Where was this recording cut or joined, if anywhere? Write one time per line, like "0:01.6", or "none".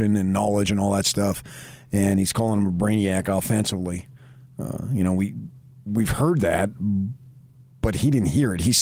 none